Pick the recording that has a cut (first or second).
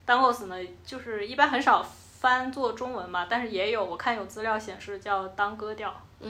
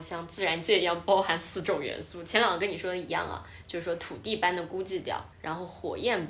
second